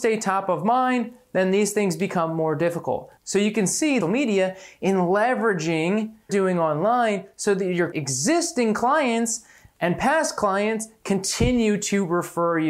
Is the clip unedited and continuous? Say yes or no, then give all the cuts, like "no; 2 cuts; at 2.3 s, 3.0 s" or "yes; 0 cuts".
no; 3 cuts; at 4.0 s, 6.3 s, 7.9 s